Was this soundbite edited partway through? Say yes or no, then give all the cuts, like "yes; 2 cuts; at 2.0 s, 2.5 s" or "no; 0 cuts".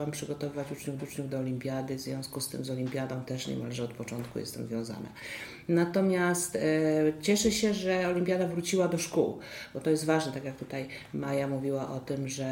yes; 1 cut; at 1.0 s